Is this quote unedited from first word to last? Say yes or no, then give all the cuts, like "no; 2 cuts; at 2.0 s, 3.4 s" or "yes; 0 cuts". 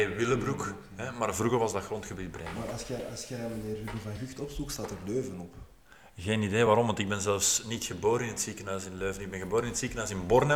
yes; 0 cuts